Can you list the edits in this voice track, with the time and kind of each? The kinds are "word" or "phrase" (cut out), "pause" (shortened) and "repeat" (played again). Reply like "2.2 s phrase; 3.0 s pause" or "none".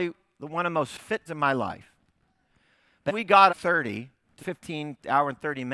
1.3 s word; 3.1 s word; 3.5 s phrase; 4.4 s phrase